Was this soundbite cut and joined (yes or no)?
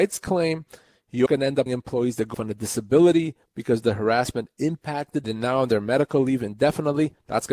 yes